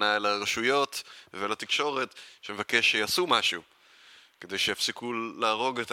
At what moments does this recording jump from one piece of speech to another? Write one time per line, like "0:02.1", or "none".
none